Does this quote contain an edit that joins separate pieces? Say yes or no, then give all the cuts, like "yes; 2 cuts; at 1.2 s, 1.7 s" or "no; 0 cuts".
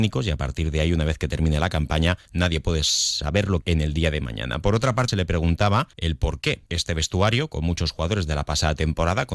yes; 5 cuts; at 2.3 s, 3.6 s, 5.1 s, 5.9 s, 6.7 s